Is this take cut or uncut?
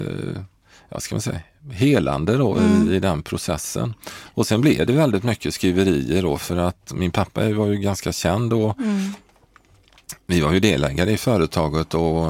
uncut